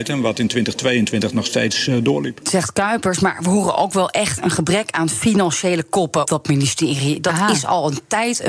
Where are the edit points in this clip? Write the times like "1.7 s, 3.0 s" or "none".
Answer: 6.2 s